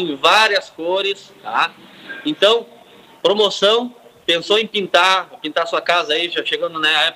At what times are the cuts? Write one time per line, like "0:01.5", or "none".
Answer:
none